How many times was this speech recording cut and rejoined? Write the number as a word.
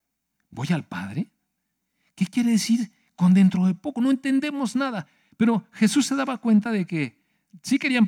zero